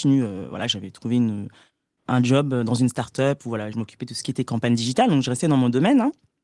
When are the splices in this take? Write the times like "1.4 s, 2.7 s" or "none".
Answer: 3.7 s